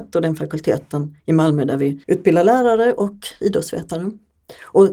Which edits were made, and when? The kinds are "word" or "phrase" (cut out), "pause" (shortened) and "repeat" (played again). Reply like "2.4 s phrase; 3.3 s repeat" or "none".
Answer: 1.2 s pause; 2.0 s pause